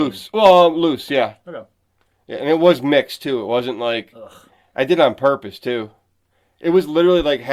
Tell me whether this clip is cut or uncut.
uncut